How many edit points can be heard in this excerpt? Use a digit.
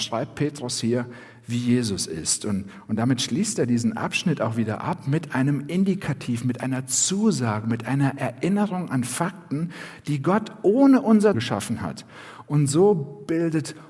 1